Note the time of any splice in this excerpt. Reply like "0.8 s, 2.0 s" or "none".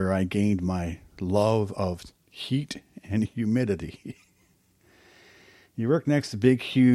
none